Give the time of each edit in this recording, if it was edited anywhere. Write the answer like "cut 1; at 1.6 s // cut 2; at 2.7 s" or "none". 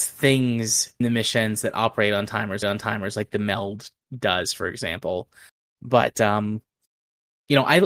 cut 1; at 1.0 s // cut 2; at 2.6 s